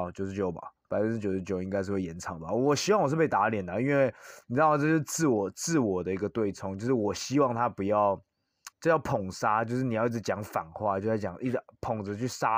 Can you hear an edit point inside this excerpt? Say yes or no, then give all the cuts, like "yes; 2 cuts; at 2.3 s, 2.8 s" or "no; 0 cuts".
yes; 2 cuts; at 4.4 s, 8.7 s